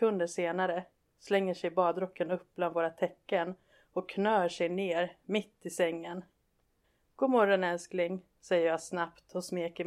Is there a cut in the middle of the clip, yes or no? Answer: no